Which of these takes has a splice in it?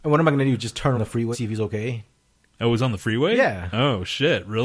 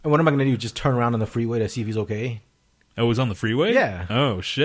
first; 2 cuts; at 0.9 s, 1.3 s

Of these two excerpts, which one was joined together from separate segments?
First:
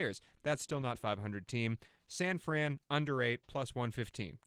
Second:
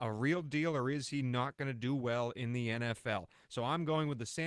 first; 1 cut; at 1.0 s

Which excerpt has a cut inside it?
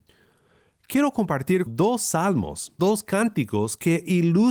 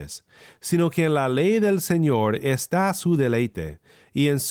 first; 2 cuts; at 1.7 s, 2.8 s

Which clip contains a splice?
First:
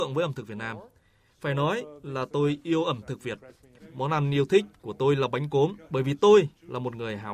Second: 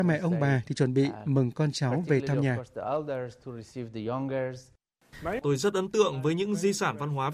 first; 1 cut; at 5.8 s

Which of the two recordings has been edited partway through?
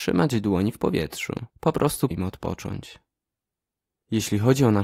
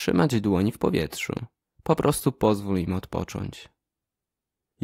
first; 2 cuts; at 1.5 s, 2.1 s

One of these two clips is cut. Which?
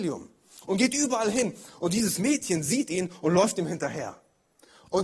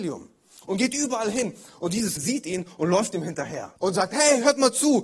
second; 2 cuts; at 2.2 s, 3.8 s

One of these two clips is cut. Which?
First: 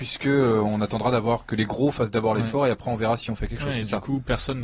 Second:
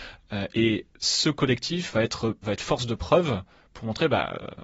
second; 1 cut; at 2.4 s

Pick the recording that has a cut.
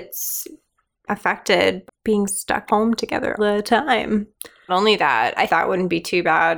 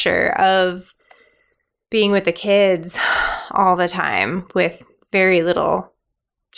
first; 6 cuts; at 1.1 s, 1.9 s, 2.7 s, 3.4 s, 4.7 s, 5.5 s

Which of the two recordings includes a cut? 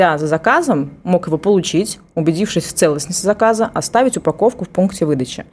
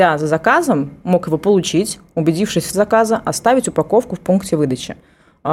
second; 1 cut; at 2.7 s

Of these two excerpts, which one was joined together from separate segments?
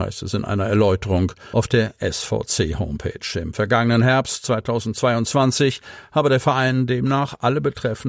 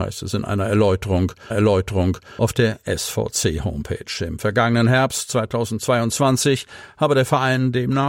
second; 1 cut; at 1.5 s

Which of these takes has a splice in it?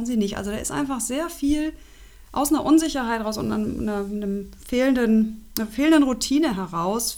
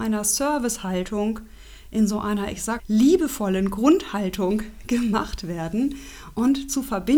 second; 1 cut; at 2.8 s

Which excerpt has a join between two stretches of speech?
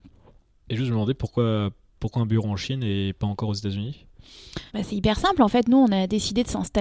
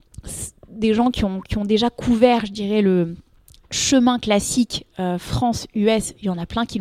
first; 1 cut; at 4.7 s

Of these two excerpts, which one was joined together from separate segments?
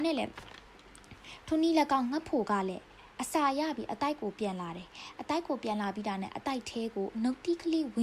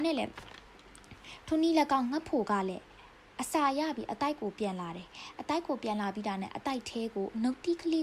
first; 1 cut; at 3.1 s

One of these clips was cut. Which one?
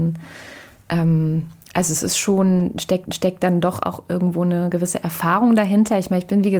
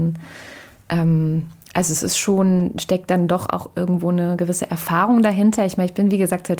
first; 1 cut; at 3.1 s

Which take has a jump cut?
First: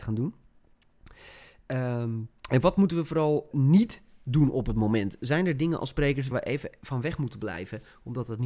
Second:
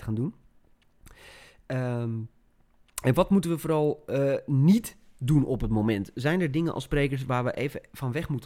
first; 3 cuts; at 2.4 s, 3.5 s, 6.3 s

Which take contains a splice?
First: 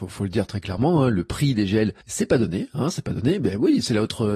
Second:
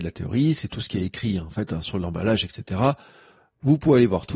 first; 1 cut; at 2.0 s

